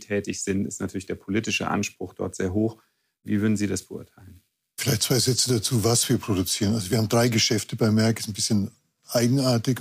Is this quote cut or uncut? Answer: uncut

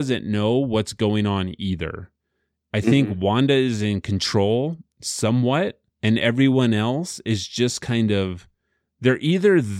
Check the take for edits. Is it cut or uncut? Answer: cut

